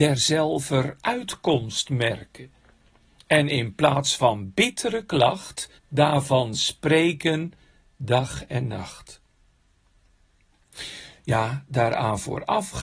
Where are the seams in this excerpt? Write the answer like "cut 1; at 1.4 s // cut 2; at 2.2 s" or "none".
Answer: cut 1; at 5.8 s